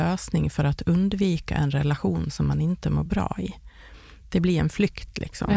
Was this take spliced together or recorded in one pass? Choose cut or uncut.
uncut